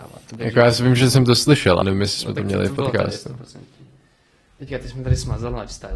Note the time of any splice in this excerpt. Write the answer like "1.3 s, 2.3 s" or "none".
1.8 s

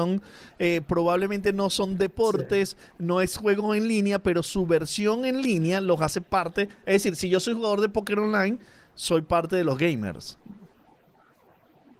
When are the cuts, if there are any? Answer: none

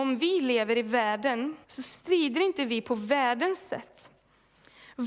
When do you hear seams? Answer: 1.6 s

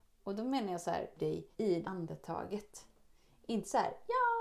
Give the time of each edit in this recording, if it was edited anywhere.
1.2 s, 1.5 s, 1.8 s

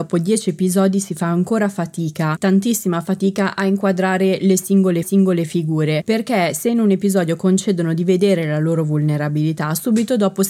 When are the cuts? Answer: 5.0 s

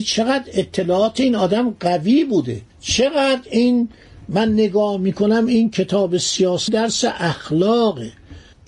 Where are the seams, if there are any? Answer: 2.7 s, 6.7 s

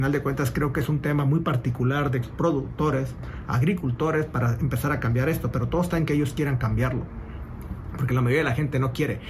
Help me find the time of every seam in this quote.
2.2 s

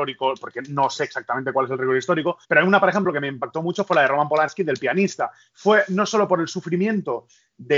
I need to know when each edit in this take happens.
2.4 s

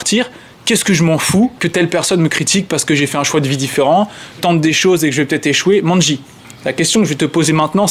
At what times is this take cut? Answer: 4.4 s

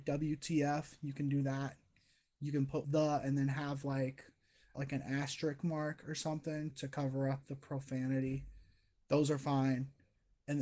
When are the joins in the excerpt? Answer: 2.8 s, 4.7 s, 6.7 s

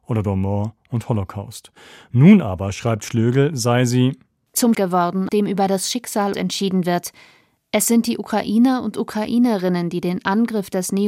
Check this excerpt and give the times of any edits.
4.7 s, 5.3 s, 6.3 s

